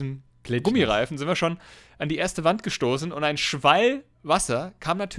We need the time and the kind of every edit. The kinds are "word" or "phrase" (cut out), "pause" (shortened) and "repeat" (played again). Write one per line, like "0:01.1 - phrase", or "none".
none